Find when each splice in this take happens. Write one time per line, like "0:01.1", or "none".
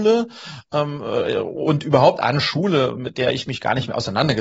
none